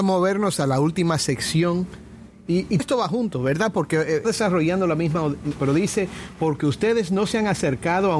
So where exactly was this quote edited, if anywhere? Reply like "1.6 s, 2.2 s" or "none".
2.8 s, 4.2 s, 5.6 s